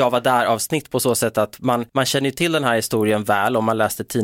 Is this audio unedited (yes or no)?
no